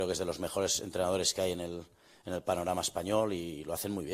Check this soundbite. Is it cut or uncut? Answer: uncut